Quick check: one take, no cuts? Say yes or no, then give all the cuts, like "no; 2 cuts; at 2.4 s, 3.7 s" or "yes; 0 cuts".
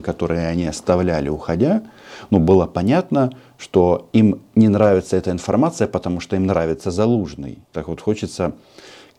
no; 1 cut; at 7.6 s